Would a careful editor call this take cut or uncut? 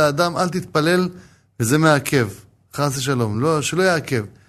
uncut